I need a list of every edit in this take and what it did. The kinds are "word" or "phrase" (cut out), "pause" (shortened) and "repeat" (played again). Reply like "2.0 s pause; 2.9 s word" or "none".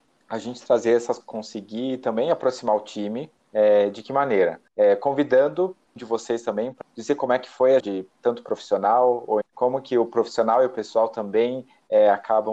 1.2 s word; 3.4 s pause; 4.7 s pause; 6.0 s word; 6.8 s phrase; 7.8 s word; 9.4 s word